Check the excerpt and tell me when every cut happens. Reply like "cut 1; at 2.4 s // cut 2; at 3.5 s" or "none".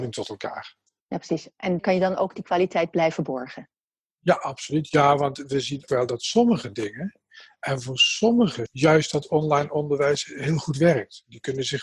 cut 1; at 1.8 s // cut 2; at 5.9 s // cut 3; at 8.7 s

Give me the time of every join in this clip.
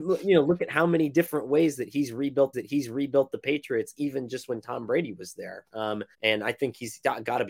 cut 1; at 2.5 s // cut 2; at 6.1 s

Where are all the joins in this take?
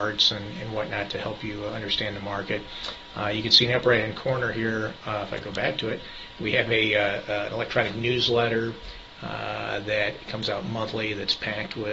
none

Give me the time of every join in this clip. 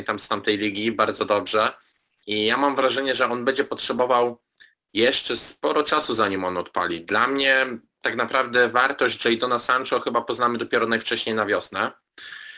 none

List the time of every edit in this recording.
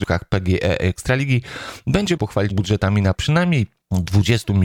cut 1; at 2.2 s // cut 2; at 2.5 s // cut 3; at 3.1 s

